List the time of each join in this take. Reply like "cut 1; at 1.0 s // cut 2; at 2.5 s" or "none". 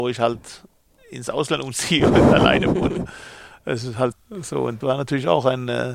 cut 1; at 4.1 s // cut 2; at 4.8 s